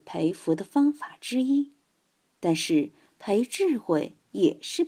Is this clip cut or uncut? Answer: uncut